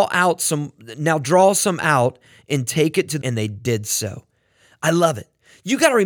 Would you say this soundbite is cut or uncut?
cut